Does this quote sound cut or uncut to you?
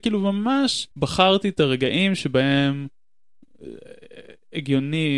cut